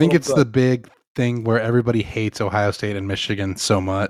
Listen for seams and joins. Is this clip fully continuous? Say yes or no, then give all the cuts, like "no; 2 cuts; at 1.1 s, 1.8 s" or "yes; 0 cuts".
yes; 0 cuts